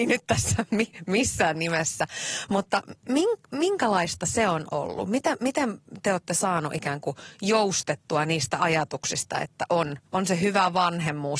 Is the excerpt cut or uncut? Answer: cut